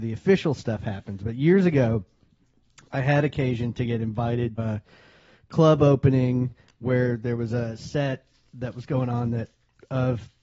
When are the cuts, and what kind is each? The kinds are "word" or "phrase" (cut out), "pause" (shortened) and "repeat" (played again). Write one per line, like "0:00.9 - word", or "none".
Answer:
0:04.6 - word